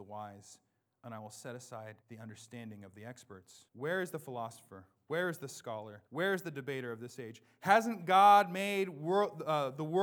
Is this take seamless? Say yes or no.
no